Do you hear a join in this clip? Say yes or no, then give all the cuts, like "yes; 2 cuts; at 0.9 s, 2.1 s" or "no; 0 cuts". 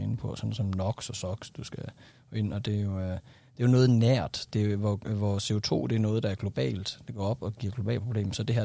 no; 0 cuts